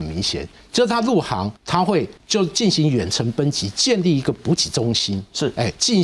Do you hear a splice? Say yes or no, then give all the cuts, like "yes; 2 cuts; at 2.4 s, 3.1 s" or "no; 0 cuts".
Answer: yes; 2 cuts; at 1.6 s, 2.2 s